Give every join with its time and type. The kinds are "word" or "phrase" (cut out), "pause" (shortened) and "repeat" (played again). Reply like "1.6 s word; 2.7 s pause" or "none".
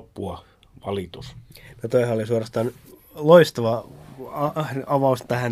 none